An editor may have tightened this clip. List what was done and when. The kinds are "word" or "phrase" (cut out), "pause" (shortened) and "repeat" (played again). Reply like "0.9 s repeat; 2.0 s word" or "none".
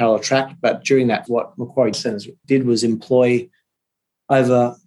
1.3 s word; 1.9 s word; 2.4 s word